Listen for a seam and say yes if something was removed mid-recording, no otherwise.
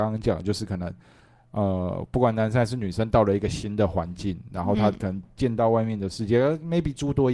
no